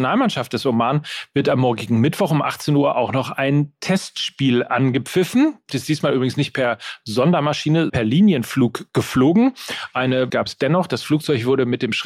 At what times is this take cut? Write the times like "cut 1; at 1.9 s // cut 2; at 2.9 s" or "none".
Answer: cut 1; at 5.7 s // cut 2; at 7.9 s // cut 3; at 10.3 s